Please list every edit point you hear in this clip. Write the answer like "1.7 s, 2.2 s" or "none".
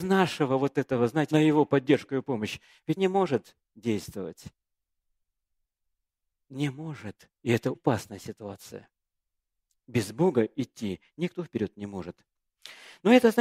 1.3 s, 3.0 s, 7.4 s, 7.7 s

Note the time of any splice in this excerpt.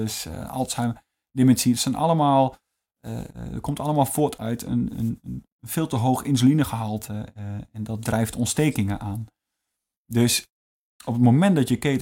none

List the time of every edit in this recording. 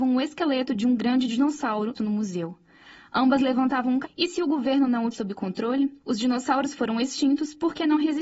1.9 s, 4.0 s, 5.1 s, 6.0 s

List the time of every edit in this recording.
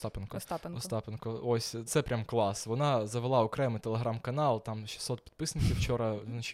1.9 s

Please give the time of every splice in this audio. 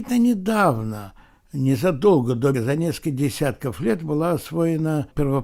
2.5 s

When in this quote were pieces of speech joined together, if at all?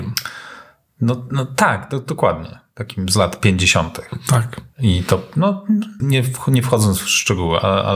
4.7 s, 6.0 s

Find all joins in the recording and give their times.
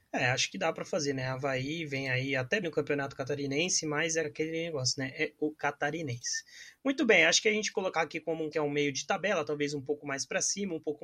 2.6 s, 4.2 s, 5.5 s, 7.7 s, 8.5 s

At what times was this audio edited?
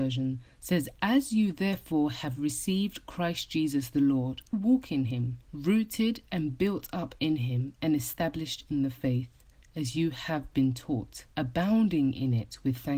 4.5 s, 5.4 s, 11.3 s

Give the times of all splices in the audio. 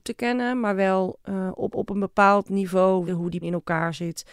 1.2 s, 1.7 s, 3.1 s, 3.4 s

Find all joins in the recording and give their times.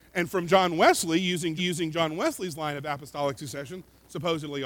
1.6 s

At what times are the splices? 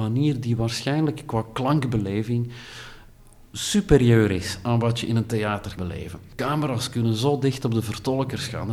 5.8 s

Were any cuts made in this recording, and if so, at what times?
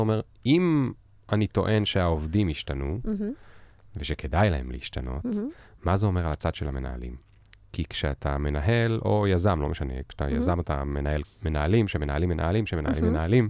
11.2 s

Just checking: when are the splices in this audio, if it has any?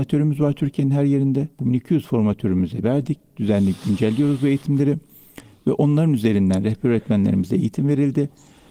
1.5 s, 2.8 s

